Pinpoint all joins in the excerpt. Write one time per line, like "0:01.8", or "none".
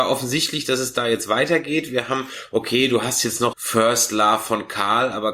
0:03.5